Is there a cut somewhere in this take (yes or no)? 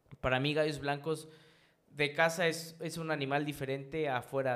no